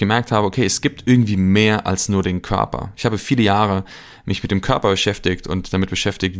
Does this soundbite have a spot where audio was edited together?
no; 0 cuts

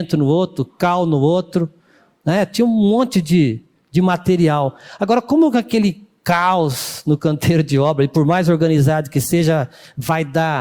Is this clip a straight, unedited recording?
yes; 0 cuts

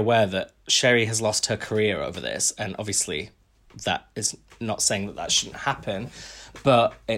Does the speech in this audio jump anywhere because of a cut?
no; 0 cuts

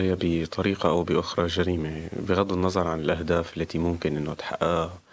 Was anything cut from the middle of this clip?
no; 0 cuts

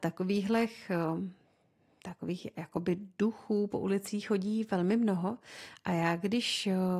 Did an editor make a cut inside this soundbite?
no; 0 cuts

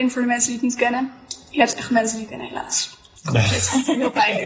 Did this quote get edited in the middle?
yes; 1 cut; at 2.3 s

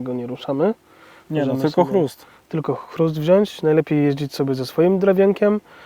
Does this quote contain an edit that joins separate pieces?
no; 0 cuts

